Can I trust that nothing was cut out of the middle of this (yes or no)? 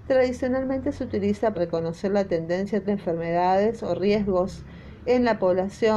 no